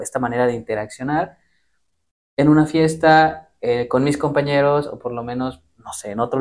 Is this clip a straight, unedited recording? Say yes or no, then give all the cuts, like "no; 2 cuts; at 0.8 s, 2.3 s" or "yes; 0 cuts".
yes; 0 cuts